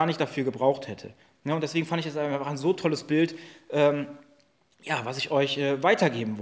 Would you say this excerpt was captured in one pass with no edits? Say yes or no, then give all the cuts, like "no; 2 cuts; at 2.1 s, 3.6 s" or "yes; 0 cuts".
yes; 0 cuts